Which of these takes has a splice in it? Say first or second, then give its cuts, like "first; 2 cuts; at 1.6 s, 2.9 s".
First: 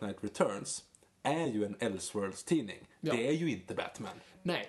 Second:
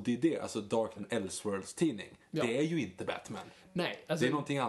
second; 1 cut; at 1.0 s